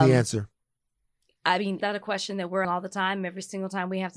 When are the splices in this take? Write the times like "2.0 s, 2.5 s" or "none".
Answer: 1.8 s, 2.6 s